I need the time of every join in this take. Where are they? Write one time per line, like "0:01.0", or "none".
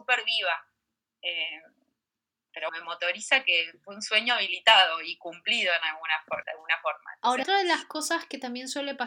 0:02.7
0:06.4
0:07.4